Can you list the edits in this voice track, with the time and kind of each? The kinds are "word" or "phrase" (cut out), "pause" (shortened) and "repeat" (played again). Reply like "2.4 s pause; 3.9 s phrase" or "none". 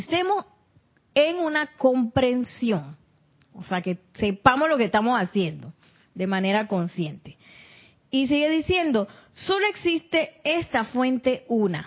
none